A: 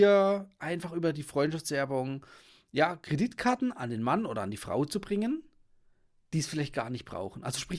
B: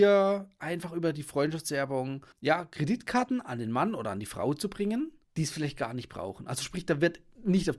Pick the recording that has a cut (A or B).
B